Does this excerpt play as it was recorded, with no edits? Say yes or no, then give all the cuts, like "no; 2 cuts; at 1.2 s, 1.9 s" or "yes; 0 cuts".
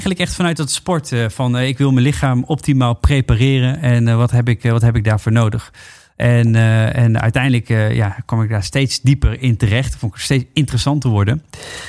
yes; 0 cuts